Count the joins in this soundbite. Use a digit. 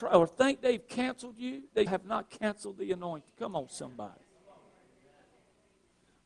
1